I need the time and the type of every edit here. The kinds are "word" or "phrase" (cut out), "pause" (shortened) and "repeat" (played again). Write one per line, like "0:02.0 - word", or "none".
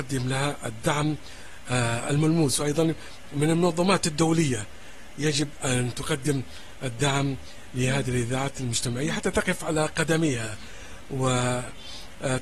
none